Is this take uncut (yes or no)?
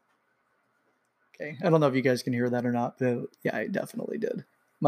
yes